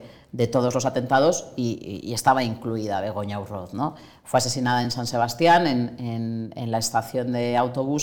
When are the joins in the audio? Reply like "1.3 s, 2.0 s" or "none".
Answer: none